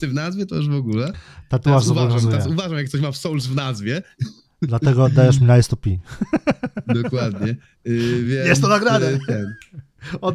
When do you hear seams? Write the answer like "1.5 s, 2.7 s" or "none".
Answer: none